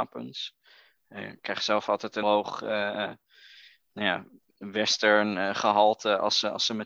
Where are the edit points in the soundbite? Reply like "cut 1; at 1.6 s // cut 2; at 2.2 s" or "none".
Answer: cut 1; at 2.2 s